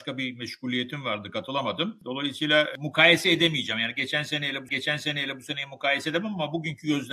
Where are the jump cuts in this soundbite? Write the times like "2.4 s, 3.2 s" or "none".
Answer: 4.7 s